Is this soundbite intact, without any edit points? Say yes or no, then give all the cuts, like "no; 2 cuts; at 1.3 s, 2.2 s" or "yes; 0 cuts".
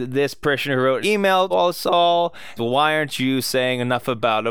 no; 3 cuts; at 1.0 s, 1.5 s, 2.6 s